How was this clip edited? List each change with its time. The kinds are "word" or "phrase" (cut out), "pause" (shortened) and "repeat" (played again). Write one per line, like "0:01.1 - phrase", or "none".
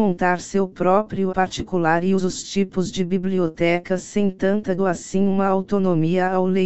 0:01.3 - word
0:02.2 - phrase
0:04.8 - phrase